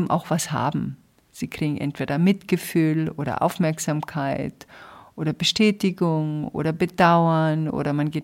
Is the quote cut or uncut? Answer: uncut